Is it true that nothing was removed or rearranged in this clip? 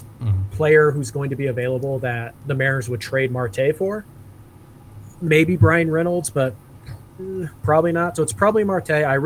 yes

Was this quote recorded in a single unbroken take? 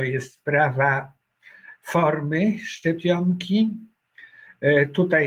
yes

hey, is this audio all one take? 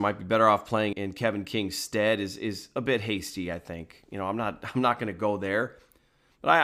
no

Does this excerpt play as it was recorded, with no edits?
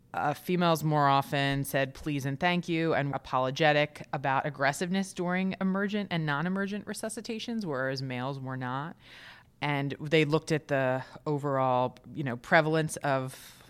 no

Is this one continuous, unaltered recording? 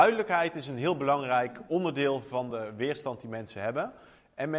yes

